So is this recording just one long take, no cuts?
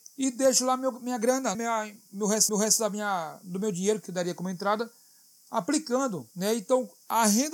no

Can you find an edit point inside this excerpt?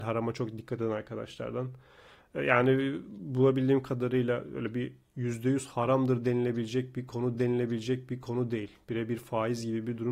yes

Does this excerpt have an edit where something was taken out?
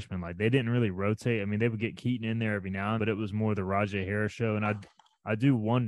yes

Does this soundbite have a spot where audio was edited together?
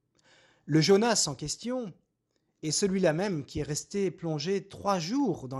no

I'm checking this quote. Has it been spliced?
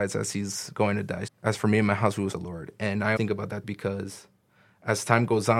yes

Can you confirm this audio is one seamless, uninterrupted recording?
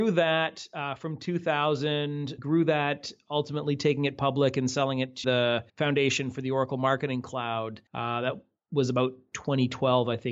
no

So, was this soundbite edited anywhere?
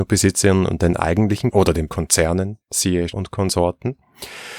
yes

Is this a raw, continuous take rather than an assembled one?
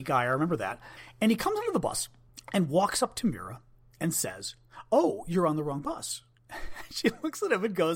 yes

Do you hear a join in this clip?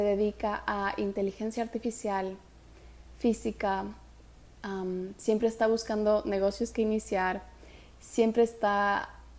no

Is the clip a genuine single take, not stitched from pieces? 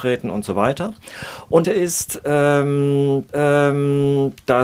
no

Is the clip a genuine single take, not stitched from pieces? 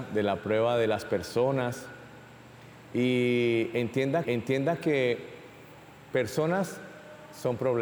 no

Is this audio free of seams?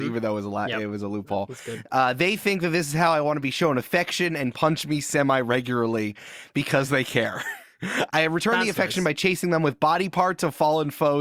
yes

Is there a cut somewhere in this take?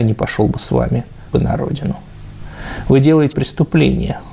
yes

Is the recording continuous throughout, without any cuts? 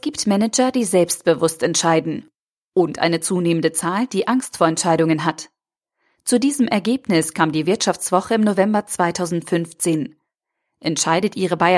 yes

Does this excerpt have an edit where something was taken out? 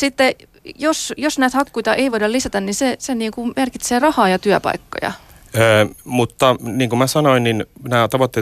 no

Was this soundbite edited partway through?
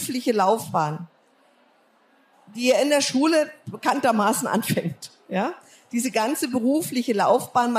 no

